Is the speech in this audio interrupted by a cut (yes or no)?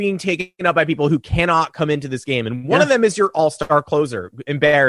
no